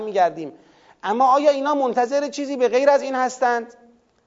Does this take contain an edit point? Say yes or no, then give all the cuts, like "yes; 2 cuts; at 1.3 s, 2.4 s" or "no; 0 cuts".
no; 0 cuts